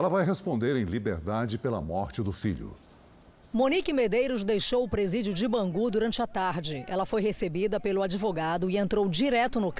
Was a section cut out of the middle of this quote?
no; 0 cuts

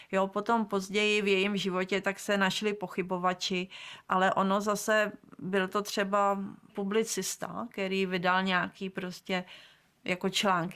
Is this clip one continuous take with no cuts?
no; 1 cut; at 6.7 s

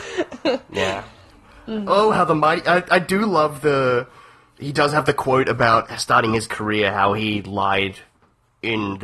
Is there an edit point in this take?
no; 0 cuts

